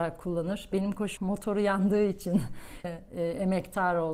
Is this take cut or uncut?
cut